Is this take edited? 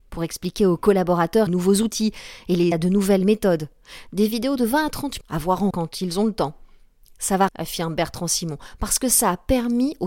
yes; 5 cuts; at 1.5 s, 2.7 s, 5.2 s, 5.7 s, 7.5 s

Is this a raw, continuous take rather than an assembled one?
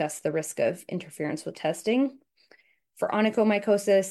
no; 1 cut; at 1.5 s

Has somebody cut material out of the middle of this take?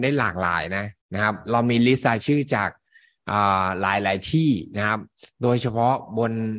yes; 1 cut; at 1.0 s

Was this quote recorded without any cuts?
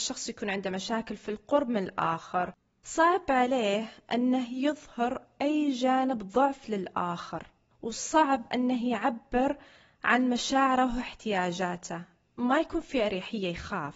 no; 1 cut; at 2.6 s

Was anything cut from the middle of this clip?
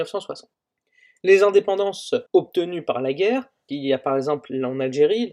yes; 2 cuts; at 2.3 s, 3.7 s

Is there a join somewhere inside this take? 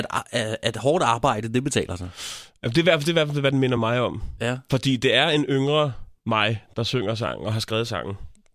no; 0 cuts

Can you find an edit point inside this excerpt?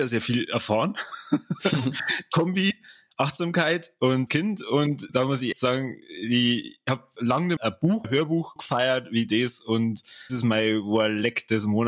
yes; 8 cuts; at 4.3 s, 5.1 s, 5.5 s, 7.2 s, 7.6 s, 8.0 s, 8.6 s, 10.3 s

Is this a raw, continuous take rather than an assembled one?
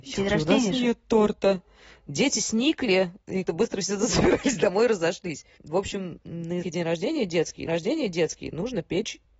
no; 3 cuts; at 3.5 s, 6.6 s, 7.7 s

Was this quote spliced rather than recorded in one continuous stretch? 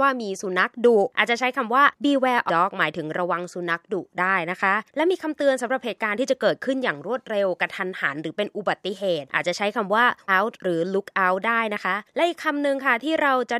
yes; 2 cuts; at 2.5 s, 10.3 s

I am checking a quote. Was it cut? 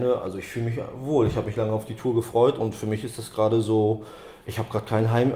no; 0 cuts

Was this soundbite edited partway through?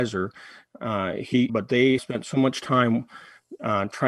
yes; 2 cuts; at 1.5 s, 2.0 s

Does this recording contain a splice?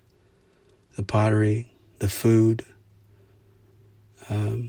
no; 0 cuts

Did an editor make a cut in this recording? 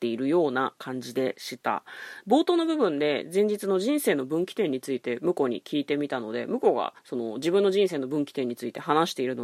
yes; 1 cut; at 7.0 s

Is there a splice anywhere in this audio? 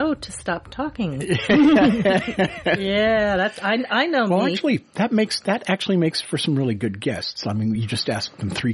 no; 0 cuts

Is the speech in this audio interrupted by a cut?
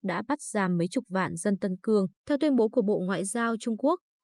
yes; 1 cut; at 2.2 s

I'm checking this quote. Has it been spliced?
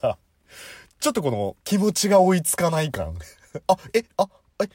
yes; 1 cut; at 1.6 s

